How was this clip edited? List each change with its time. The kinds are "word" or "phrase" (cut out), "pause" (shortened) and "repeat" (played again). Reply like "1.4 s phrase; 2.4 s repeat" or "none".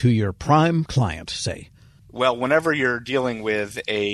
none